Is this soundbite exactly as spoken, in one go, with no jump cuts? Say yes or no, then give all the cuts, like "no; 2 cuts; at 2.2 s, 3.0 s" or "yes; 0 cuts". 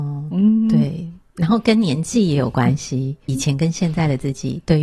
no; 1 cut; at 3.3 s